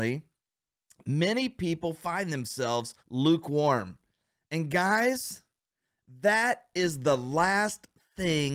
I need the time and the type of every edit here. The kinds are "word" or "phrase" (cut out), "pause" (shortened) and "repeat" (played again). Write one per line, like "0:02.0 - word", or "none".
0:03.0 - pause